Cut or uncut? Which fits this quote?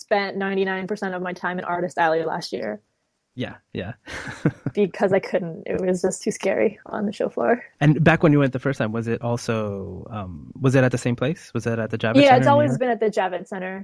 cut